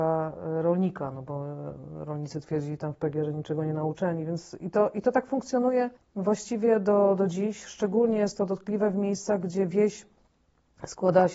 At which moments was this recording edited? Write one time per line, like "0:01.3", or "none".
0:06.0